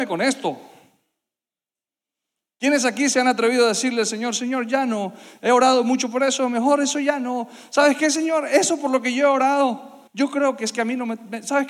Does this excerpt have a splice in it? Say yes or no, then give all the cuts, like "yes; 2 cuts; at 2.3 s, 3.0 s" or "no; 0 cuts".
yes; 1 cut; at 10.1 s